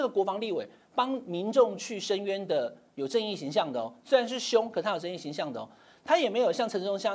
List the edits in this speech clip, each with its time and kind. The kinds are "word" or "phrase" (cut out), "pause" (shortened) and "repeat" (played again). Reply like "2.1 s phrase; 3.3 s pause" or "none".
none